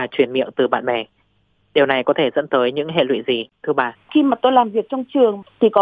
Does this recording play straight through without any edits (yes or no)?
no